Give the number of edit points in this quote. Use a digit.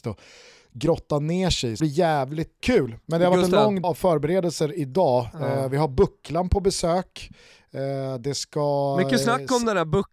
3